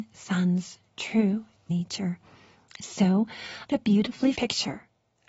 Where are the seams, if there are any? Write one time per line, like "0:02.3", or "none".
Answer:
0:01.7
0:03.7
0:04.4